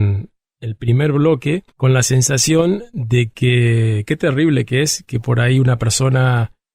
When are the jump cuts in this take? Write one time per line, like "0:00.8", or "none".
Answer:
0:01.7